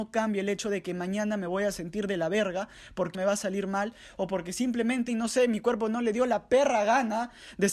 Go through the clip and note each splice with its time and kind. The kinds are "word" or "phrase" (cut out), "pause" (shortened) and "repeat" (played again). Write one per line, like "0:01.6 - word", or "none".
0:03.1 - word
0:05.1 - word

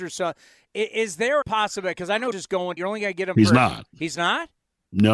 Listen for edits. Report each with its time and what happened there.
0:01.4 - word
0:02.3 - word
0:02.8 - word

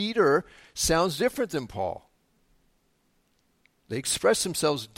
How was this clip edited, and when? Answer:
none

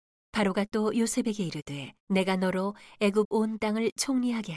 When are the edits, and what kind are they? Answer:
0:02.0 - pause

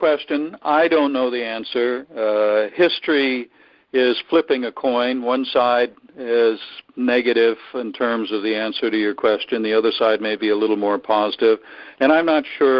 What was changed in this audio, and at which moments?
none

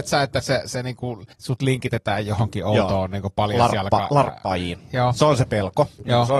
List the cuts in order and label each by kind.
0:01.3 - pause

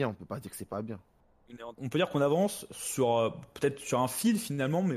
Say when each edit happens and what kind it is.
0:01.7 - word

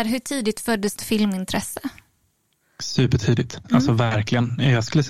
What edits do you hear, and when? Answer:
0:01.0 - word

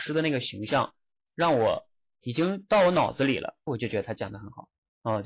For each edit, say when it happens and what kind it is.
0:03.7 - word

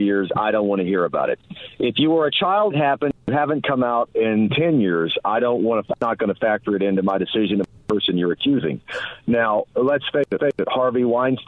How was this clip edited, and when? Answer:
0:02.7 - word
0:10.4 - repeat

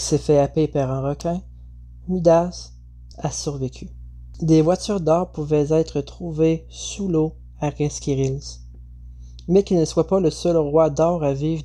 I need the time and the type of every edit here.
none

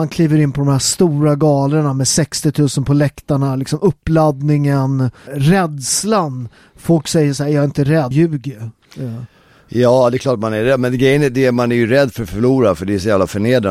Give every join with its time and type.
0:05.3 - word
0:08.1 - word

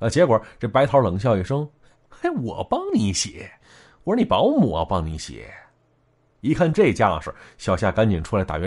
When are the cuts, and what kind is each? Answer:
none

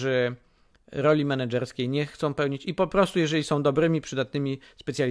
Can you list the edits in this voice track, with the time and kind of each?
none

